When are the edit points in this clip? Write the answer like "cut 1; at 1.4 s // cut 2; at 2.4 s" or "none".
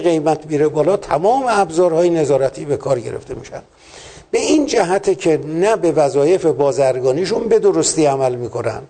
none